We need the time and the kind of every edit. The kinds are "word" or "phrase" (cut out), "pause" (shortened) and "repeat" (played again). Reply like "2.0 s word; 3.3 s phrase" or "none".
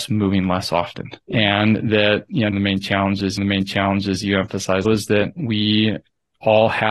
1.2 s pause; 2.5 s phrase; 3.4 s repeat; 4.8 s word